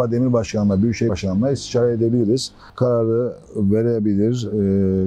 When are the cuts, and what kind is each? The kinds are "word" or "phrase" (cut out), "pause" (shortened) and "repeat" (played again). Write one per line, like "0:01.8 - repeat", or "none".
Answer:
0:01.1 - word